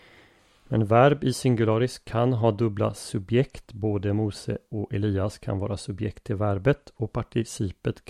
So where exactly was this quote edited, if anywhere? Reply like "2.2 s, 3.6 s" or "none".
none

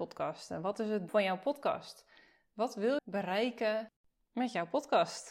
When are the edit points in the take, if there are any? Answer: 1.1 s, 3.0 s

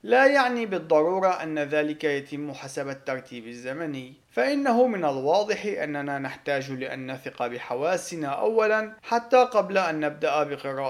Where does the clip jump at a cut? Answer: 4.2 s, 9.0 s

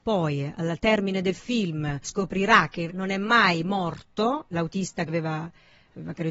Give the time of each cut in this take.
2.0 s, 2.9 s, 4.5 s, 5.1 s

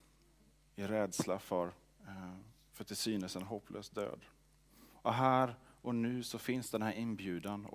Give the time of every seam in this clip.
none

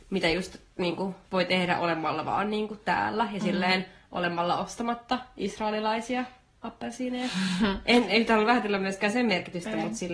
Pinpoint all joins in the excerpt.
1.2 s

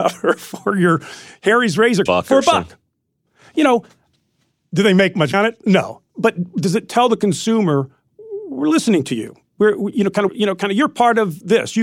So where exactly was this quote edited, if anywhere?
2.1 s, 5.3 s, 10.3 s

